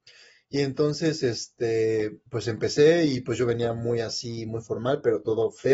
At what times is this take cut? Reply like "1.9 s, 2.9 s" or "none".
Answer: 2.3 s

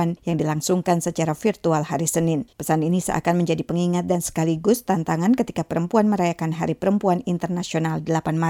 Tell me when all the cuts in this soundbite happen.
2.5 s

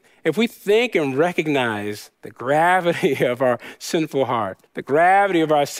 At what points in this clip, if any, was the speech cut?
2.1 s, 4.7 s

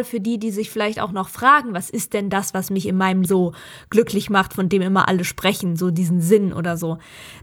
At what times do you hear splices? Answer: 3.2 s

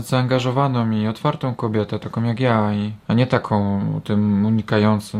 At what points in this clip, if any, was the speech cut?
3.0 s

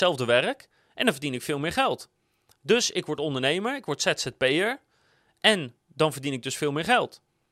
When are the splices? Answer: none

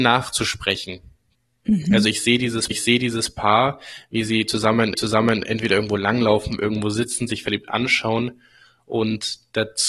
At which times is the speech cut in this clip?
2.7 s, 4.9 s

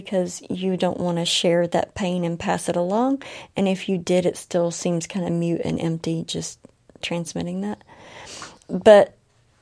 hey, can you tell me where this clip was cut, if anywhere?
none

